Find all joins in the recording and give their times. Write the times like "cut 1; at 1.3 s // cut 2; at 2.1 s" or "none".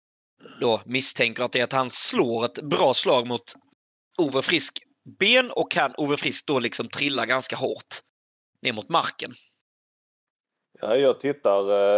none